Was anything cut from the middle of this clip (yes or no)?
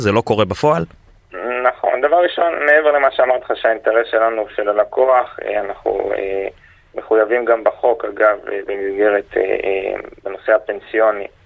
no